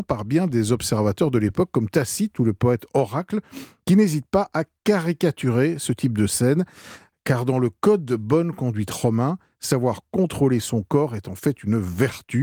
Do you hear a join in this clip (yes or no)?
no